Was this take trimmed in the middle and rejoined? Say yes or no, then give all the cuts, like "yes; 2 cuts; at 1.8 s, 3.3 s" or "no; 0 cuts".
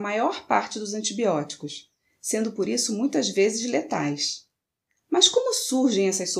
no; 0 cuts